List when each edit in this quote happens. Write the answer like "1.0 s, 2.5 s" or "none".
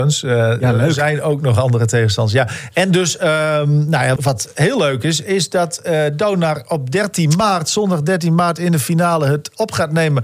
4.2 s